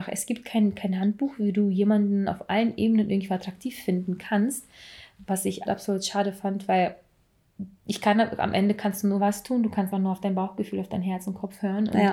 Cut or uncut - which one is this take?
cut